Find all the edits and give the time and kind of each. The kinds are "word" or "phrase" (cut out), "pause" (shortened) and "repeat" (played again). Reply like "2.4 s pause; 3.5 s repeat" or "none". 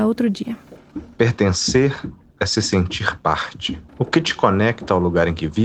3.9 s pause

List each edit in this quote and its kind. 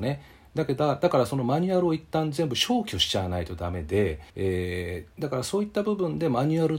4.3 s pause

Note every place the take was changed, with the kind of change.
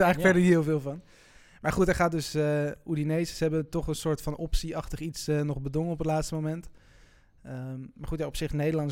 none

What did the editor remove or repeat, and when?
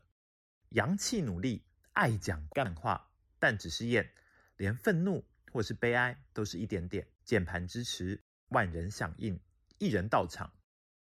3.2 s phrase; 7.2 s pause

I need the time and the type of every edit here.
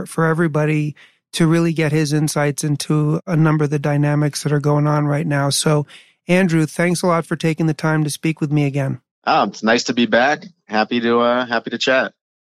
none

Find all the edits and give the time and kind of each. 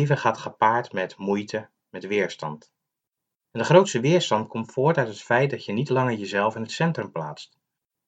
none

